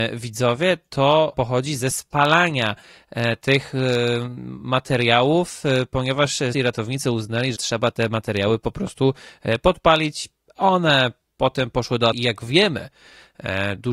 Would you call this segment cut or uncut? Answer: cut